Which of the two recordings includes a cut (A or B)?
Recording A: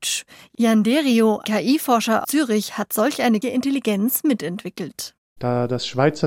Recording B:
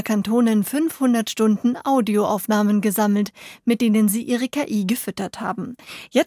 A